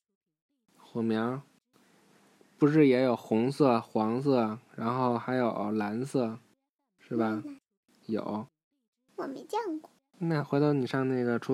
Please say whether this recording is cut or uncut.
uncut